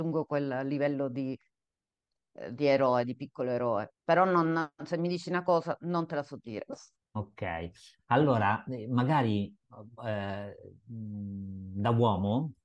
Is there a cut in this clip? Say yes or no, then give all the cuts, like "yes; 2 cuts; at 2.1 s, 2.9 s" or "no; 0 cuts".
yes; 2 cuts; at 3.9 s, 7.0 s